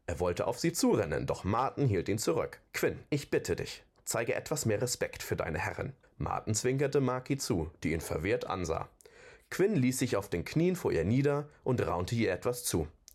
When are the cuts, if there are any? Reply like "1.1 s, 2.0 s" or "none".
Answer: 2.7 s, 6.0 s